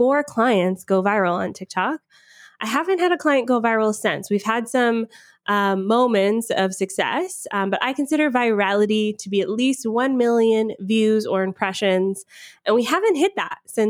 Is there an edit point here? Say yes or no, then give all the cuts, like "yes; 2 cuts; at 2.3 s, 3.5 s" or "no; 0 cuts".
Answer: no; 0 cuts